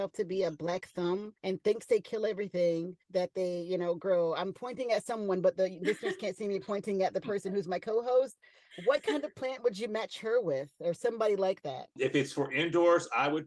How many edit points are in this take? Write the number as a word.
two